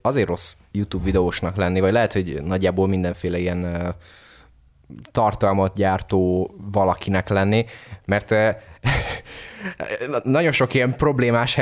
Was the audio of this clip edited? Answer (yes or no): no